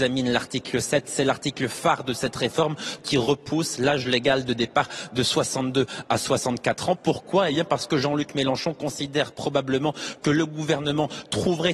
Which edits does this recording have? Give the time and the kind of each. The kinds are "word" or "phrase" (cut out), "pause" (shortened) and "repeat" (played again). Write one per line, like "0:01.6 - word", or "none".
0:03.0 - word